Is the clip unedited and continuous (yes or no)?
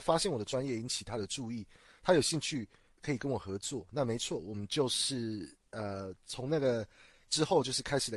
no